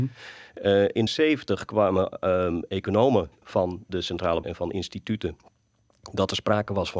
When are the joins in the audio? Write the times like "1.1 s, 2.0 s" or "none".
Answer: 1.1 s, 3.4 s, 4.4 s